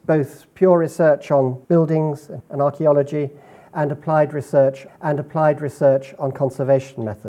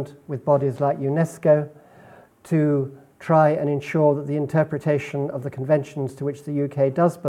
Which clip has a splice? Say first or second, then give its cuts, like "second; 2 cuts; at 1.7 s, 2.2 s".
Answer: first; 3 cuts; at 1.6 s, 2.4 s, 4.9 s